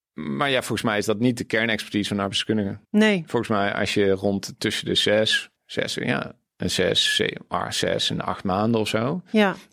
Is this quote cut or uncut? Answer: cut